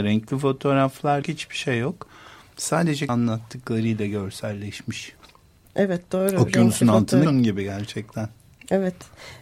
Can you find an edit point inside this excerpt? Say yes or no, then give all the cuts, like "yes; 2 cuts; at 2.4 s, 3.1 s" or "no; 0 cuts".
yes; 3 cuts; at 1.2 s, 3.1 s, 7.2 s